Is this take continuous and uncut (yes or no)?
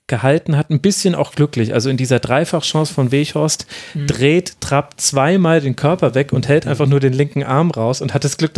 yes